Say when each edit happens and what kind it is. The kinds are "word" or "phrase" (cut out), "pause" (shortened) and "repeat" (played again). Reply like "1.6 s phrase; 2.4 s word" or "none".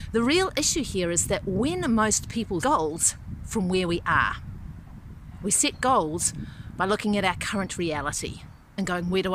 2.6 s phrase